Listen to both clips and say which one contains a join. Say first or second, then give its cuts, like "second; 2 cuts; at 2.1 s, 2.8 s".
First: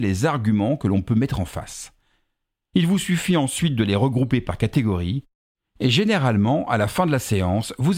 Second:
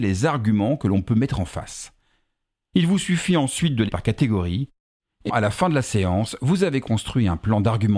second; 2 cuts; at 3.9 s, 5.3 s